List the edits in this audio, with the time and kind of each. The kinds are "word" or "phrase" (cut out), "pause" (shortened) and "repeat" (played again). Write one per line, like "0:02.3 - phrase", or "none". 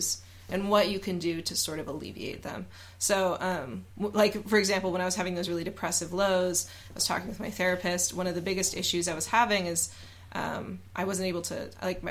none